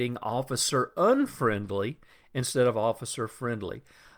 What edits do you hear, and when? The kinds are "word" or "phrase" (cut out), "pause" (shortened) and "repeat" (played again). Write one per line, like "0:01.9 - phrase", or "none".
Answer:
none